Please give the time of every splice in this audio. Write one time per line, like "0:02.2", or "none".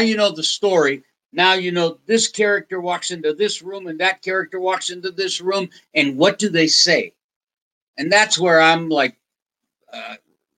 none